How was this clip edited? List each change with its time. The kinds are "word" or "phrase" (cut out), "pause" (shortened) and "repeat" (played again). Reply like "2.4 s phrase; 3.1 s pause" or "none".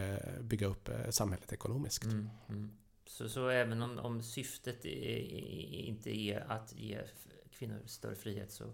none